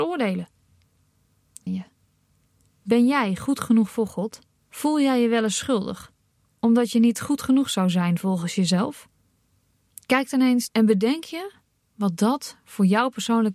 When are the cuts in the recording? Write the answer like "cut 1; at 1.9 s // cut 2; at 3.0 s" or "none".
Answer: cut 1; at 1.7 s // cut 2; at 4.6 s // cut 3; at 10.7 s